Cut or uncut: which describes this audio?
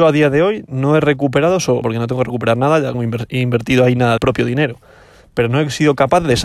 cut